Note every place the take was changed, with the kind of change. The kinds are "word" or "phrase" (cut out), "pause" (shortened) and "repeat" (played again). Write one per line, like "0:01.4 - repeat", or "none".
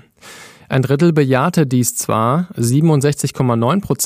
none